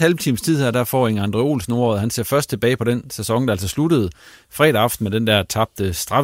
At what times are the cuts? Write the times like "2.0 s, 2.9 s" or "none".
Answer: none